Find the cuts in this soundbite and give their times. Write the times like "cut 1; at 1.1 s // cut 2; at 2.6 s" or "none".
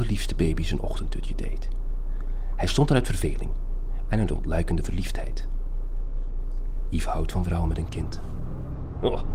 none

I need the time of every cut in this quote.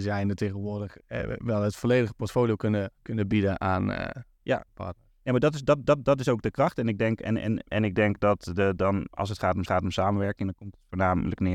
cut 1; at 1.0 s // cut 2; at 3.0 s // cut 3; at 4.7 s // cut 4; at 5.8 s // cut 5; at 7.7 s // cut 6; at 8.8 s // cut 7; at 9.1 s // cut 8; at 9.7 s

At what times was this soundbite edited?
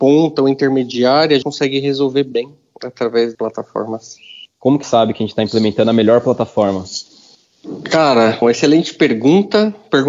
cut 1; at 1.4 s // cut 2; at 3.3 s // cut 3; at 4.8 s // cut 4; at 8.4 s

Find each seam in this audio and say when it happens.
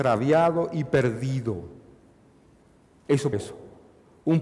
cut 1; at 3.3 s

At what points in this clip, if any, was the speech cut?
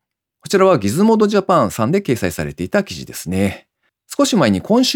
cut 1; at 3.9 s

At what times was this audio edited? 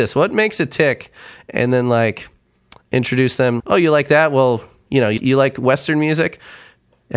cut 1; at 3.6 s // cut 2; at 5.2 s

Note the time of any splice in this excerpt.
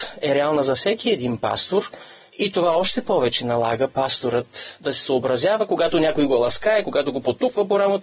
none

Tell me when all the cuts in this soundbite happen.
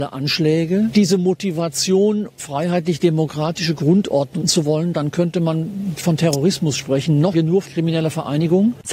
cut 1; at 0.9 s // cut 2; at 2.4 s // cut 3; at 4.4 s // cut 4; at 6.0 s // cut 5; at 7.3 s // cut 6; at 7.7 s

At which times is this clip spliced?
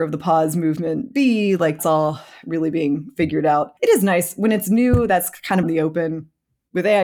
cut 1; at 1.8 s // cut 2; at 3.8 s // cut 3; at 5.6 s

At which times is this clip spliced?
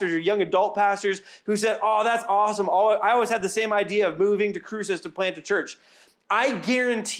none

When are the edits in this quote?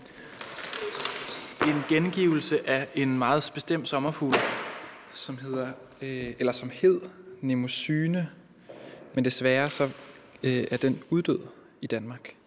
none

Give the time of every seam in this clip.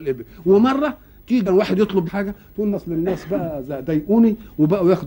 cut 1; at 1.5 s // cut 2; at 2.1 s // cut 3; at 2.7 s

